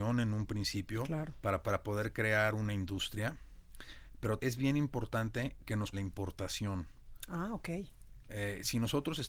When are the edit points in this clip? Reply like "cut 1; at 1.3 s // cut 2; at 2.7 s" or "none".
cut 1; at 1.6 s // cut 2; at 4.4 s // cut 3; at 5.9 s